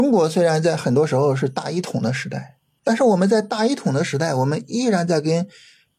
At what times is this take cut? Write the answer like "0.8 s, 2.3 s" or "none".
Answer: none